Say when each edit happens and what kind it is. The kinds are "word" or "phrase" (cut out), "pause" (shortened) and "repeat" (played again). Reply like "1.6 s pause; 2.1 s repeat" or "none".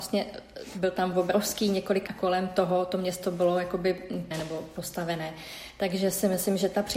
2.1 s phrase; 4.3 s word